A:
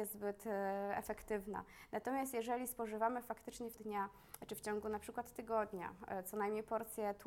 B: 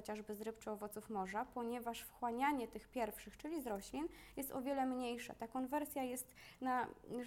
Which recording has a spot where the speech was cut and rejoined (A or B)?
A